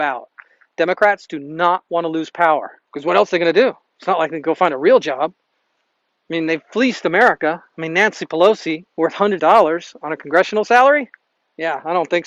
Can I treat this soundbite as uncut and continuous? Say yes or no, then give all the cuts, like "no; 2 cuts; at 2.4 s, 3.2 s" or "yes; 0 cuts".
no; 3 cuts; at 2.9 s, 8.9 s, 9.4 s